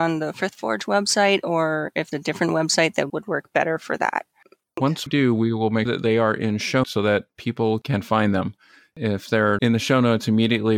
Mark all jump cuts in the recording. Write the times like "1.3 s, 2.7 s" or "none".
2.1 s, 3.1 s, 5.1 s, 5.9 s, 6.8 s, 9.6 s